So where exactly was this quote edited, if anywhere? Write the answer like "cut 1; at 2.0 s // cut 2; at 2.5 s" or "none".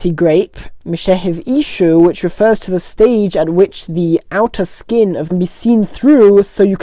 cut 1; at 5.3 s